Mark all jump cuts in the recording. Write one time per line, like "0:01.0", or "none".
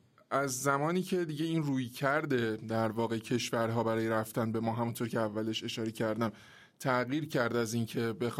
none